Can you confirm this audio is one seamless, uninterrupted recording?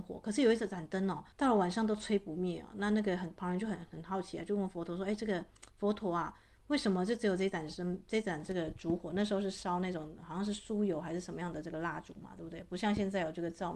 no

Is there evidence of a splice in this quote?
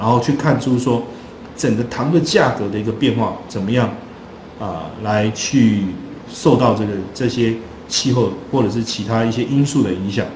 no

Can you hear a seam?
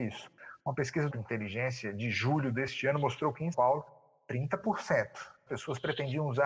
yes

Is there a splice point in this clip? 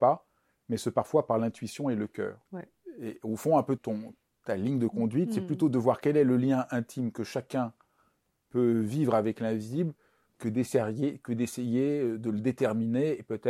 yes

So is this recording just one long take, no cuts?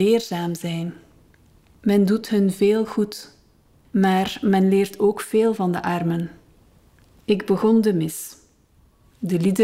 yes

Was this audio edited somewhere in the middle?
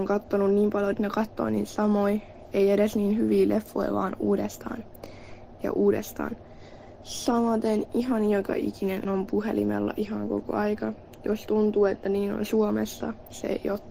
yes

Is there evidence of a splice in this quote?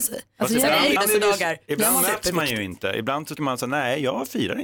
yes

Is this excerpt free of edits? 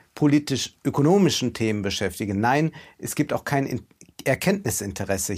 yes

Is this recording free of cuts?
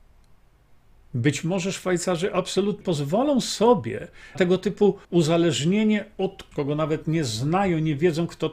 no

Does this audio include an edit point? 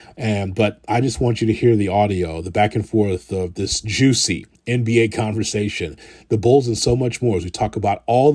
no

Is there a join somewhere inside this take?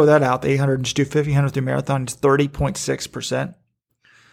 no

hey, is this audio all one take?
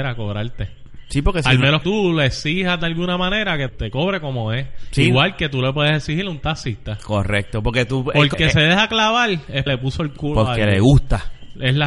no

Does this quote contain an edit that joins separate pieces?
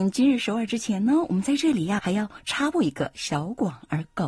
yes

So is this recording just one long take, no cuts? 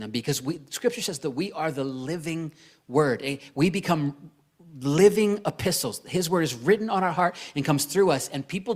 yes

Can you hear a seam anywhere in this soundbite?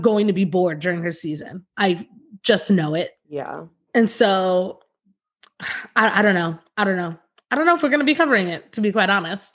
no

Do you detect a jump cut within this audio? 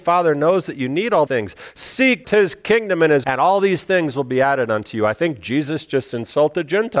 yes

